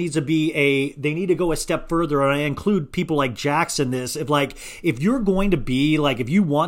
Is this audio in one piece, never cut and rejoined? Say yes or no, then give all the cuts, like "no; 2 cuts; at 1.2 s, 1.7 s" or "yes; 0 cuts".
yes; 0 cuts